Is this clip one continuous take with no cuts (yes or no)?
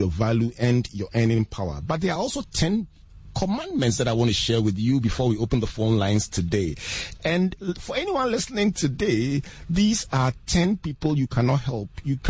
yes